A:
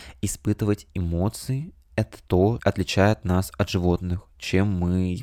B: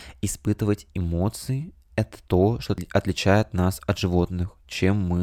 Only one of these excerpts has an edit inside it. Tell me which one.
A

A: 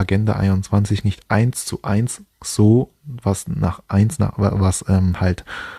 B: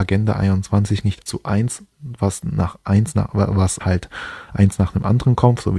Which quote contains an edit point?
B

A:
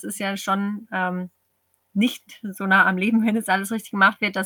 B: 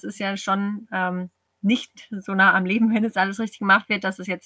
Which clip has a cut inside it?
B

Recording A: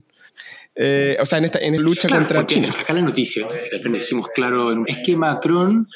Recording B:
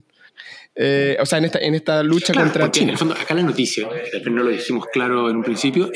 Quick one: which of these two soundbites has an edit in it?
A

